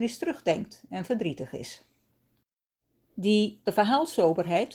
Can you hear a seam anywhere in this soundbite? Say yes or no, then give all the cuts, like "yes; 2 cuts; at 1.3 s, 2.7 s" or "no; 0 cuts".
yes; 1 cut; at 3.7 s